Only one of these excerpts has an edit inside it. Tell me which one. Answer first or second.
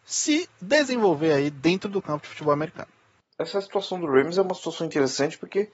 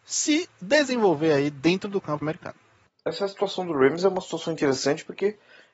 second